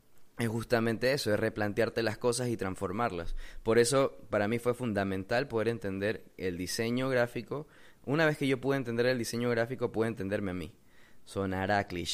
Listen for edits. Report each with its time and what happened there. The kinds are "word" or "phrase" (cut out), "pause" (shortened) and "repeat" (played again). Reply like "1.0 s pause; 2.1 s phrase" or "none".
none